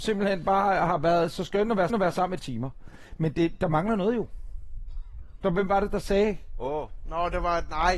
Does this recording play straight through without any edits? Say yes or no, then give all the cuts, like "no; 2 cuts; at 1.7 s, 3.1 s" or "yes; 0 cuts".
no; 2 cuts; at 1.9 s, 2.4 s